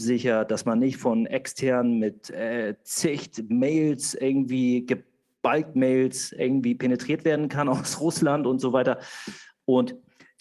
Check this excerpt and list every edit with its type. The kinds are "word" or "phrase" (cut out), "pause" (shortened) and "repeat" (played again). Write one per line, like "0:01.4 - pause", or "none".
none